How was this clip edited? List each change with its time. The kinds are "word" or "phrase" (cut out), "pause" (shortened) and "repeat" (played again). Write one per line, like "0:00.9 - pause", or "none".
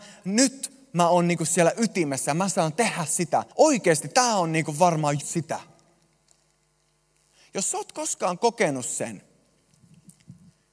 0:03.5 - pause
0:05.2 - word